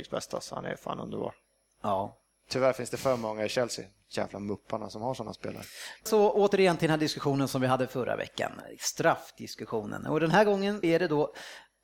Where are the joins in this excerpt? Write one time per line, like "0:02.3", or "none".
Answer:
0:06.1
0:10.8